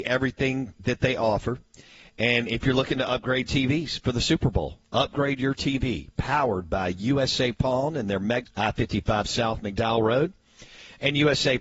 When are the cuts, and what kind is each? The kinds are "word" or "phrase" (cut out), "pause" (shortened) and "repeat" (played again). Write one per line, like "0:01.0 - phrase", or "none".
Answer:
0:08.4 - word